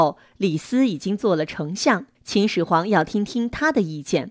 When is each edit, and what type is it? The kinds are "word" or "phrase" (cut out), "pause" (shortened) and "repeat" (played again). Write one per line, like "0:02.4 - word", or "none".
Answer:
0:02.1 - pause